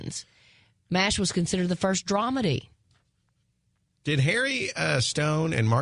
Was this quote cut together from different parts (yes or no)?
no